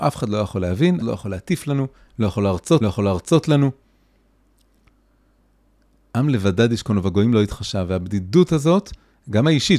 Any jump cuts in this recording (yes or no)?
yes